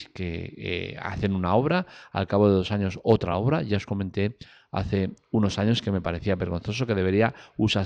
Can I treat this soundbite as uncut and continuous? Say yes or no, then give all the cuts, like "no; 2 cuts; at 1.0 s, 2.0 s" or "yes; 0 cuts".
yes; 0 cuts